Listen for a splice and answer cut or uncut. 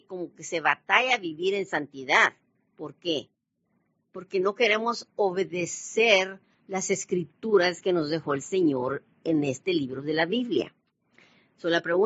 uncut